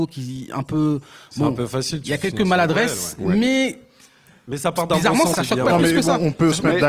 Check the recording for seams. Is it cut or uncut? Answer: cut